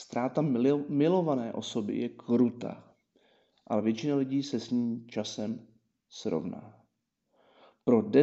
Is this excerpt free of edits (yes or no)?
yes